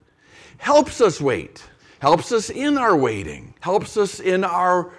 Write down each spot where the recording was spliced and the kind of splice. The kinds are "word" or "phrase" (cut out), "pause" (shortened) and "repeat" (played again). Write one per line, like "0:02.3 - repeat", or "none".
0:01.8 - pause
0:03.6 - pause